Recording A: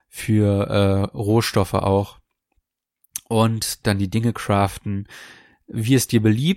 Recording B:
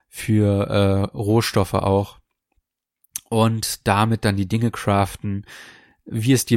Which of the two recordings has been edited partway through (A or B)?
A